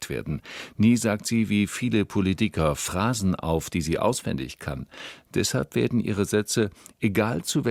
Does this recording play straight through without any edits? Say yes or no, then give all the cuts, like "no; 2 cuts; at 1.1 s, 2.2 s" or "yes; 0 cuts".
yes; 0 cuts